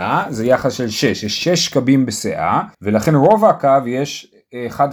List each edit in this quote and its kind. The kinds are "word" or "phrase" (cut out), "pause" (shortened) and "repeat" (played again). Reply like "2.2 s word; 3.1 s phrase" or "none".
2.7 s pause